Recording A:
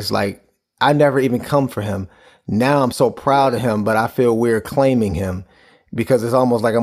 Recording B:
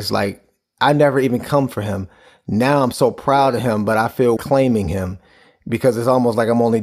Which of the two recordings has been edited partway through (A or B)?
B